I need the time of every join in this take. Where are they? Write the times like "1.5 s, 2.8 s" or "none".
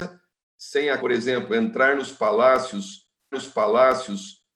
1.0 s, 3.3 s